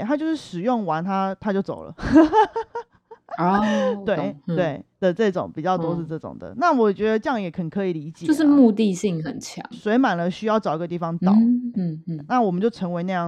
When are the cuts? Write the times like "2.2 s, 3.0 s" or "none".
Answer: 3.6 s, 11.7 s